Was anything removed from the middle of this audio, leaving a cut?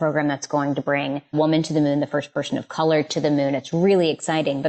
yes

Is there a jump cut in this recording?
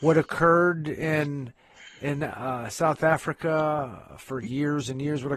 no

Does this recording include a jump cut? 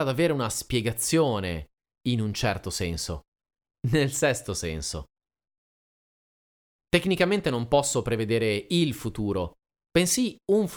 no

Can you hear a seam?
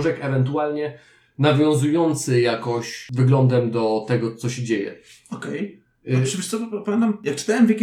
no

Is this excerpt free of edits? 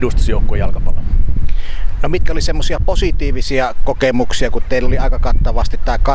yes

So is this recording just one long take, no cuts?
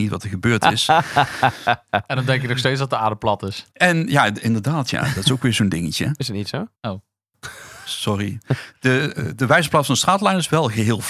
no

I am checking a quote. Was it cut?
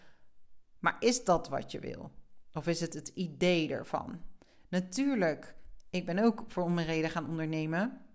no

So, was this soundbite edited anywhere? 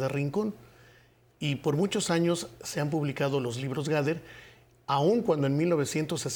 no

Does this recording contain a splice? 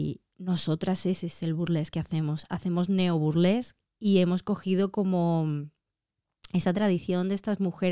no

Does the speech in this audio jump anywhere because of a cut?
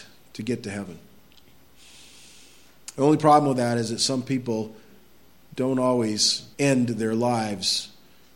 yes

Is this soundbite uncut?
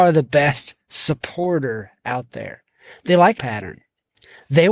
no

